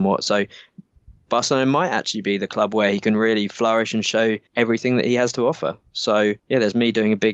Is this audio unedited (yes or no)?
no